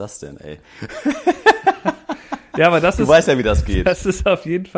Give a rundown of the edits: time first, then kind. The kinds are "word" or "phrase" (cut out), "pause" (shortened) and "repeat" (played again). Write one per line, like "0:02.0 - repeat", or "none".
none